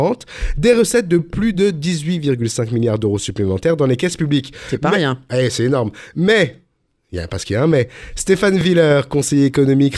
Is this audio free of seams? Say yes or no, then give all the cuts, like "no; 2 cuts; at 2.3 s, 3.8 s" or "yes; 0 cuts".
yes; 0 cuts